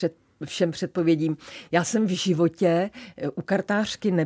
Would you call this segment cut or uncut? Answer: uncut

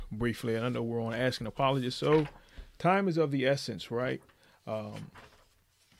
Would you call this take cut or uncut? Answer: uncut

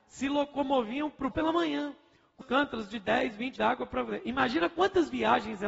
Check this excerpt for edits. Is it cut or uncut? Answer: cut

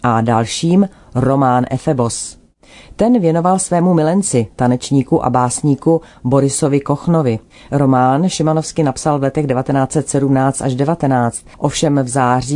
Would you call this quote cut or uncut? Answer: cut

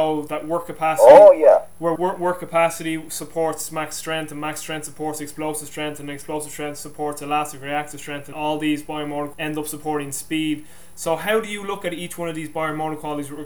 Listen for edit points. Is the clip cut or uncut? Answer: cut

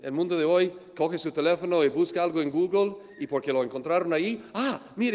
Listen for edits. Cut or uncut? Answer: uncut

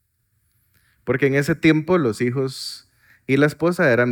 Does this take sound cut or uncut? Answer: uncut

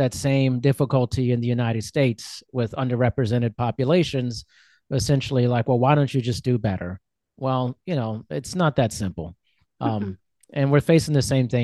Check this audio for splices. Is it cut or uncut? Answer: uncut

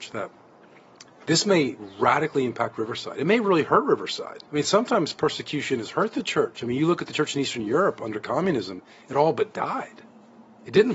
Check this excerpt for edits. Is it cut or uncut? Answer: cut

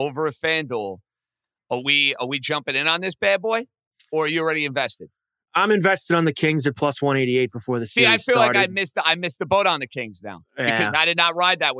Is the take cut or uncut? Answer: uncut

